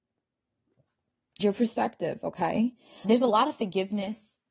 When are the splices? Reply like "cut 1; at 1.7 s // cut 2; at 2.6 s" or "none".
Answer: cut 1; at 1.4 s // cut 2; at 3.0 s

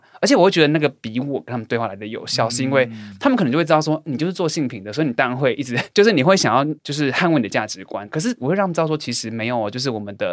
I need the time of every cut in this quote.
cut 1; at 6.8 s

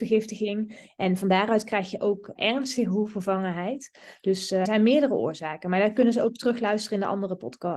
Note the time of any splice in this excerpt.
cut 1; at 2.4 s // cut 2; at 4.7 s

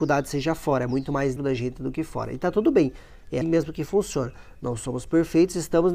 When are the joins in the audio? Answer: cut 1; at 1.4 s // cut 2; at 3.4 s

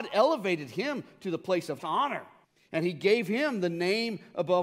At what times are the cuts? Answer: cut 1; at 1.8 s // cut 2; at 2.4 s

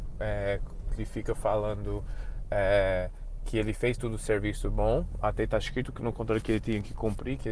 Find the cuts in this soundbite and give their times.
cut 1; at 1.0 s

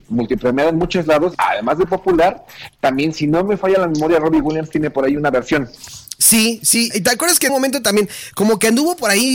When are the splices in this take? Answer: cut 1; at 1.3 s // cut 2; at 6.9 s // cut 3; at 7.5 s

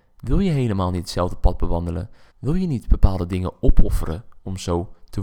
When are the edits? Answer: cut 1; at 2.3 s

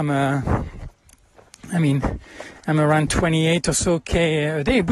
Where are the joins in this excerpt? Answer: none

